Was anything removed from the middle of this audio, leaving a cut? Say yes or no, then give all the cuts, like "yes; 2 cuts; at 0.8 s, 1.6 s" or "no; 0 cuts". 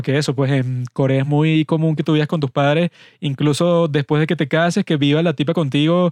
no; 0 cuts